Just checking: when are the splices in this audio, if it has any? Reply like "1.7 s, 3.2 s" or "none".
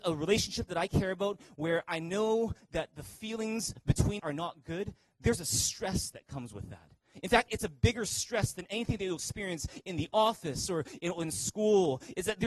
4.2 s